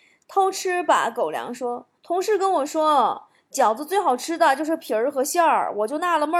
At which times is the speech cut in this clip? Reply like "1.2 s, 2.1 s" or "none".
2.0 s